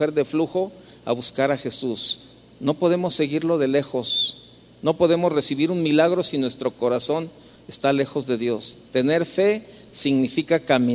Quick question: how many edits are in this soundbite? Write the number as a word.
zero